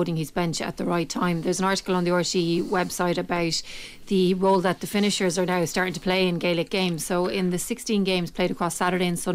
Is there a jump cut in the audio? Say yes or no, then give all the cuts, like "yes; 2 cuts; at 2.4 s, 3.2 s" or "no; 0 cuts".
no; 0 cuts